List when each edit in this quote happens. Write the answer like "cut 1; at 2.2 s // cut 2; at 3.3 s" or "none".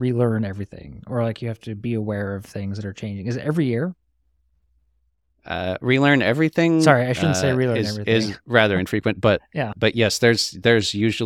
cut 1; at 9.7 s